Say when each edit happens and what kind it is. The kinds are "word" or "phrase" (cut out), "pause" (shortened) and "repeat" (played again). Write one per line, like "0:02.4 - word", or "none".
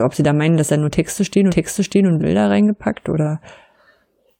0:01.5 - repeat
0:02.2 - word

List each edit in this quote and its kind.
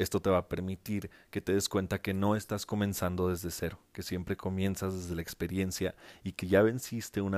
0:03.8 - pause
0:06.4 - word

